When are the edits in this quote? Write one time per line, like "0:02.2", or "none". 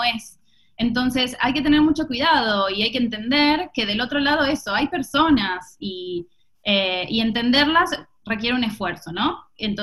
none